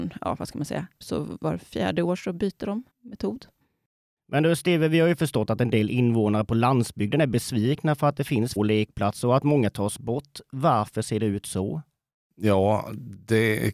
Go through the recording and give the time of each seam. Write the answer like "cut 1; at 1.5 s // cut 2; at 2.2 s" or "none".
cut 1; at 1.0 s // cut 2; at 2.9 s // cut 3; at 8.6 s